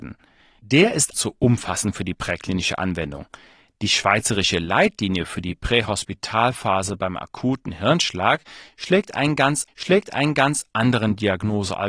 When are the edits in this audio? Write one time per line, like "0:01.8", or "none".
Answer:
0:01.1
0:09.7